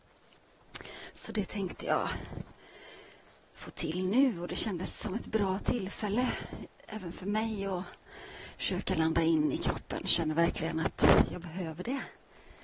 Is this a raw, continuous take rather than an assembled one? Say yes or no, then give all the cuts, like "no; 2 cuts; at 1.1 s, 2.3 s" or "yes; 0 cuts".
no; 1 cut; at 3.4 s